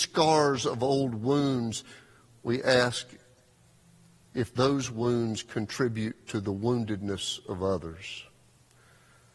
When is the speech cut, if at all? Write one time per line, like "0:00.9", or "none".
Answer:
none